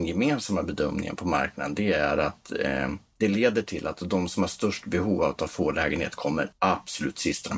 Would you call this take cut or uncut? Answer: cut